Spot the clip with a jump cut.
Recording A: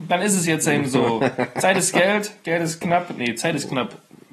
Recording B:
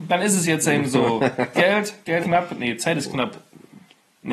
B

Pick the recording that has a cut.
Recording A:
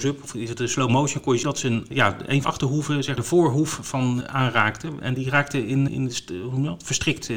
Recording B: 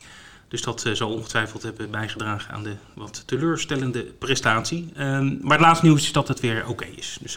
A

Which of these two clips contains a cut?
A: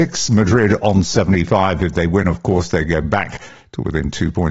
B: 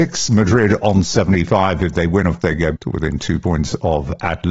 B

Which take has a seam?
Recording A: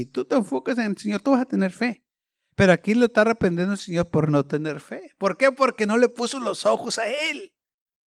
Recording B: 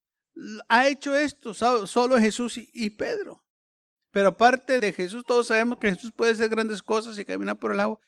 B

